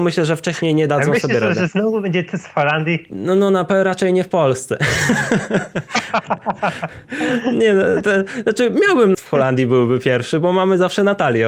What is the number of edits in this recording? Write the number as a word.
one